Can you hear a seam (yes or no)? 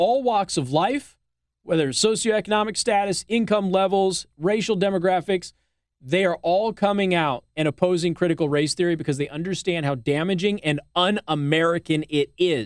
no